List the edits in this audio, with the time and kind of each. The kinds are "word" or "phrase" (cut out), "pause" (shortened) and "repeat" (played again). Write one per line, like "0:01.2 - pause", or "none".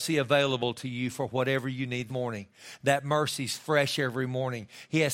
0:02.1 - word